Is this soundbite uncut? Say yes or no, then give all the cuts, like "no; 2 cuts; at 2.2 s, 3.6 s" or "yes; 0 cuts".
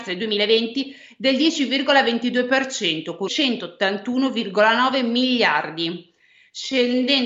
no; 1 cut; at 3.3 s